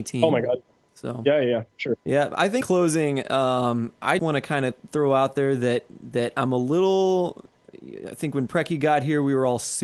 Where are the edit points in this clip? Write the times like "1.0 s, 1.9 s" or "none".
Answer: 2.0 s, 2.6 s, 4.2 s